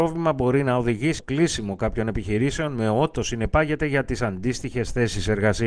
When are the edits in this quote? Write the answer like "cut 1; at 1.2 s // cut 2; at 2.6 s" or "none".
cut 1; at 1.2 s // cut 2; at 3.2 s